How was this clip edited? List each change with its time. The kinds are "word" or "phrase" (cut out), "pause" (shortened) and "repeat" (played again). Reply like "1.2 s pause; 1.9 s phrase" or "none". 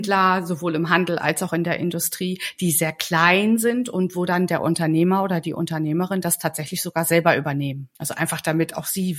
7.9 s pause